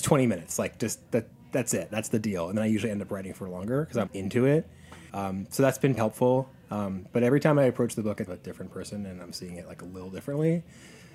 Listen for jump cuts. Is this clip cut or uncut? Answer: cut